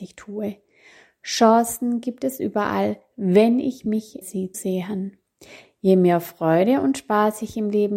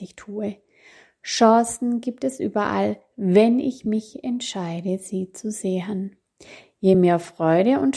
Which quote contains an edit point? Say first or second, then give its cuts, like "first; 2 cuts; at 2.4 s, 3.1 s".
first; 2 cuts; at 4.2 s, 4.5 s